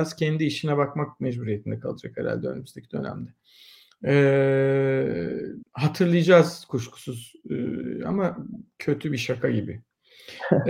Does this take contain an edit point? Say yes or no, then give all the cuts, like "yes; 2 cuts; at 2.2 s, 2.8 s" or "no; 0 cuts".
yes; 1 cut; at 5.6 s